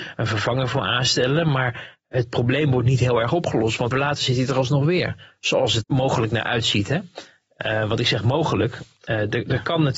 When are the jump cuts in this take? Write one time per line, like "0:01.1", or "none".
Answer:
0:03.9
0:05.8

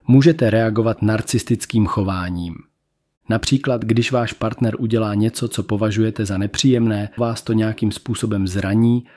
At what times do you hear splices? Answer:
0:07.2

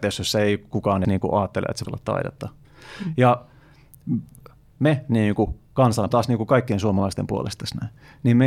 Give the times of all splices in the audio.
0:01.0
0:01.8
0:06.1

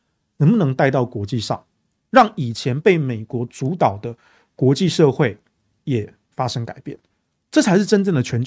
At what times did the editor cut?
none

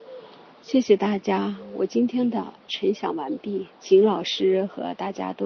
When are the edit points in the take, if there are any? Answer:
0:03.7

